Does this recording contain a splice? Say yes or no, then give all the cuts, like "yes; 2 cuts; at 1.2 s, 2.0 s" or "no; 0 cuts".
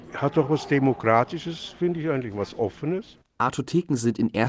no; 0 cuts